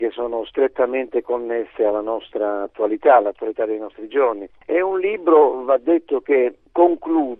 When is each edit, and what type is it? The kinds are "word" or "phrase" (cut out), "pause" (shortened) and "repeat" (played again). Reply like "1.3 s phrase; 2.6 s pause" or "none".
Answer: none